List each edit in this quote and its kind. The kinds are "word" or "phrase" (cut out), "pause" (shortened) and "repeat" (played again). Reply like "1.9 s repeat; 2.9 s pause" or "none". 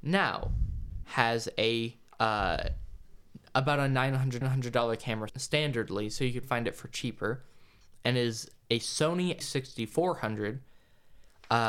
1.0 s word; 2.1 s pause; 4.4 s repeat; 5.3 s word; 6.4 s word; 9.4 s word

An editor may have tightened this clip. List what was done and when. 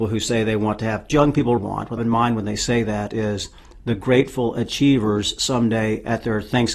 1.1 s phrase; 1.6 s word; 2.0 s phrase

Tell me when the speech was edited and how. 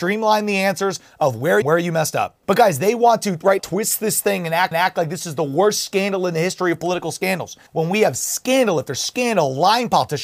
1.6 s phrase; 2.4 s pause; 3.6 s word; 4.7 s repeat; 7.7 s pause

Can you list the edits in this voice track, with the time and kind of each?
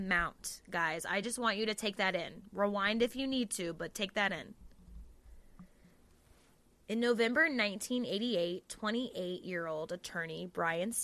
none

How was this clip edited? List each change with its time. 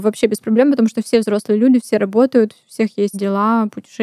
3.1 s word

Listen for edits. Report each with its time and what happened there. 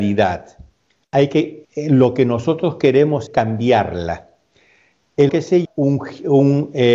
1.6 s word; 3.3 s word; 5.3 s word; 5.6 s word

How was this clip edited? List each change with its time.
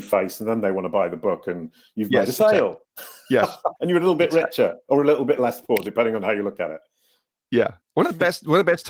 2.9 s pause; 3.8 s pause; 7.8 s pause

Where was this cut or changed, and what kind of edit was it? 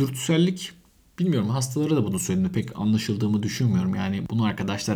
none

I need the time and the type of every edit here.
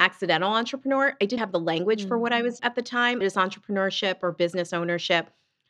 1.4 s word; 2.6 s word; 3.2 s phrase

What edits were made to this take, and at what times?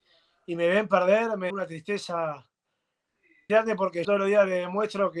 1.5 s word; 3.5 s word; 4.0 s word

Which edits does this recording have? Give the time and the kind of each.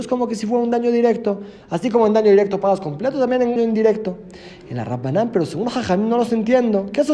3.6 s word

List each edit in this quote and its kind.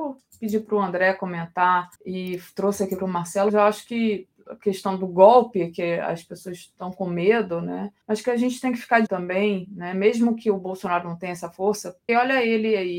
2.0 s pause; 3.5 s word; 8.0 s pause; 9.1 s word; 12.1 s word

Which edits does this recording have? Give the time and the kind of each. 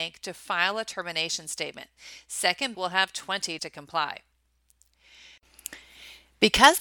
2.7 s word; 3.6 s word

